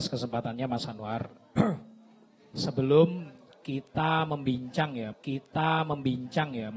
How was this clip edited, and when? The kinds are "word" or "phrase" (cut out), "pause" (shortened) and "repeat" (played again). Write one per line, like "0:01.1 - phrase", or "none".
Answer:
0:05.1 - repeat

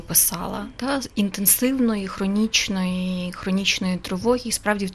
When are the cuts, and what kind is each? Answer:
none

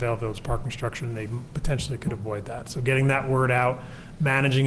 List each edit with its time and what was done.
none

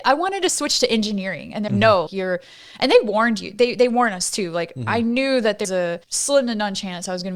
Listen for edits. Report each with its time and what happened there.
0:01.7 - word
0:02.1 - word
0:05.6 - word
0:06.0 - pause

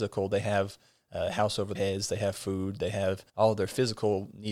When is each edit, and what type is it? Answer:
0:01.7 - word
0:03.3 - pause

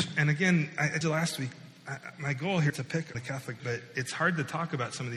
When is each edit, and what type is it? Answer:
0:01.0 - word
0:02.7 - word
0:03.1 - word
0:03.6 - word

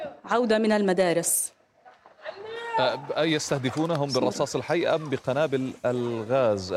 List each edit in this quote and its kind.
none

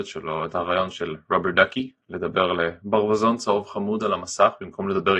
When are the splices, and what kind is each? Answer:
none

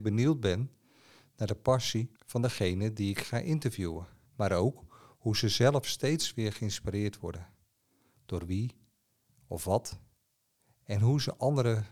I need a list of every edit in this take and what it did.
0:02.2 - pause
0:04.3 - pause

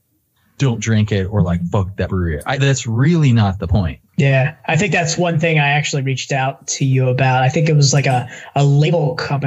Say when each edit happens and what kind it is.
0:04.1 - pause

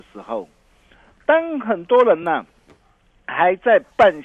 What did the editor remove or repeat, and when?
none

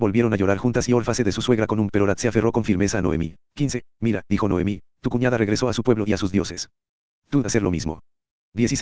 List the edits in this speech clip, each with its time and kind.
0:01.2 - word
0:01.9 - word
0:03.4 - pause
0:04.3 - word
0:07.4 - word

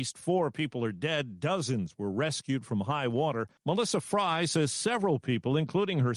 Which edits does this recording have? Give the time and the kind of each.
0:03.6 - pause

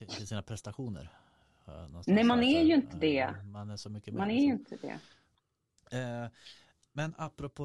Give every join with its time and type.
none

